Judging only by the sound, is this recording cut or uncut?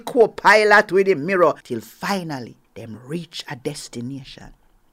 cut